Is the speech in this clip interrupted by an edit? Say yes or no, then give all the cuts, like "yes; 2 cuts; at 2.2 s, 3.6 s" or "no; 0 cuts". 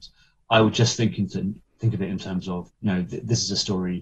yes; 1 cut; at 2.7 s